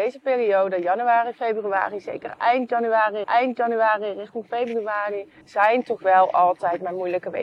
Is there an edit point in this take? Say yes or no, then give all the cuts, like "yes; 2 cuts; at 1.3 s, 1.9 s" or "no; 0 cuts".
yes; 2 cuts; at 3.2 s, 5.4 s